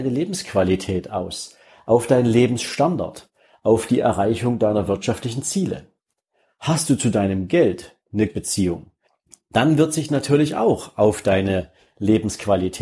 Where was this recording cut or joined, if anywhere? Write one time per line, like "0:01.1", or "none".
0:08.3
0:10.1

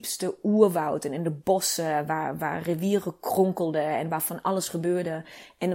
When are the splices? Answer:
none

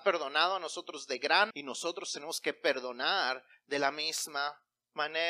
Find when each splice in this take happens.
0:01.5

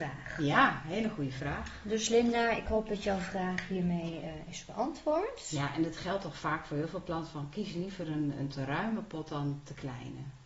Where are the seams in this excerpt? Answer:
none

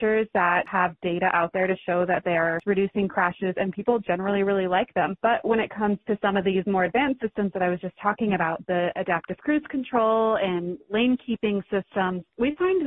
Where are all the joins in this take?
0:02.6

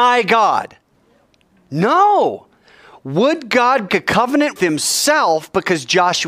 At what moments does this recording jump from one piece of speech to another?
0:03.9
0:04.6

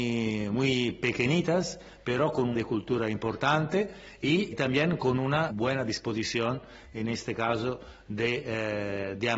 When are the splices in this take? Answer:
0:02.5
0:04.5
0:05.5

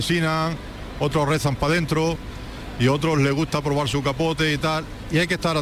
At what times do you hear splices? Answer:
none

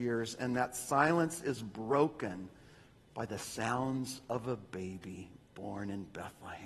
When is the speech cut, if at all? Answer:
0:02.8

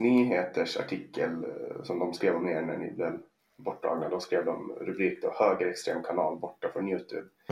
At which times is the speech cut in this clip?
none

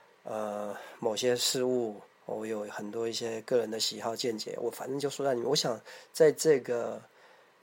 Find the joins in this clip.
0:02.1

